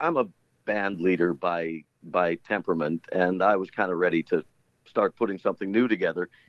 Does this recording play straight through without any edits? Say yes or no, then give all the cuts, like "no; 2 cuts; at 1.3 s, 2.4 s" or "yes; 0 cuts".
yes; 0 cuts